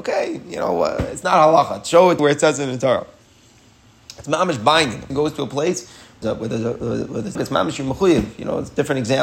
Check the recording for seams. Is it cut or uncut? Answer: cut